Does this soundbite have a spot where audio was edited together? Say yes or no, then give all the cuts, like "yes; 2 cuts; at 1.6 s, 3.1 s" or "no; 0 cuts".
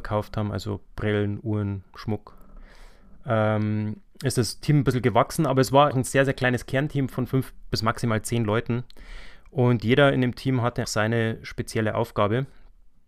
yes; 2 cuts; at 5.9 s, 10.8 s